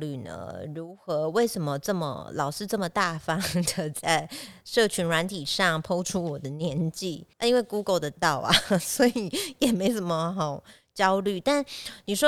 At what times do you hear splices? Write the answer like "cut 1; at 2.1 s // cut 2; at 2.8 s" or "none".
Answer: cut 1; at 7.3 s